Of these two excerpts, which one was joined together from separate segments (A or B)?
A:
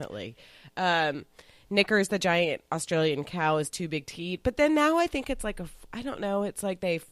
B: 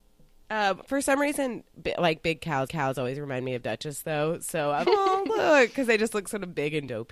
B